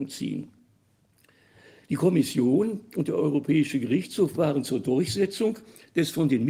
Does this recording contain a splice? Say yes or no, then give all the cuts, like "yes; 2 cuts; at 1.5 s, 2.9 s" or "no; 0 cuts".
no; 0 cuts